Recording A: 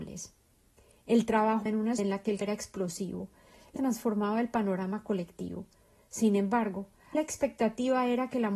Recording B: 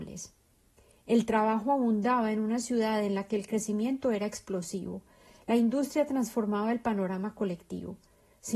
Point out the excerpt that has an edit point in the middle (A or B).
A